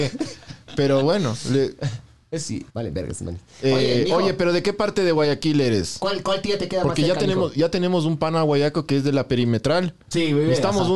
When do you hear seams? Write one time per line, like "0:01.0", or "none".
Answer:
0:02.7